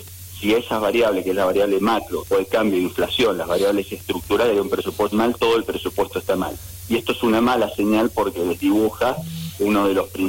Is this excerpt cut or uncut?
cut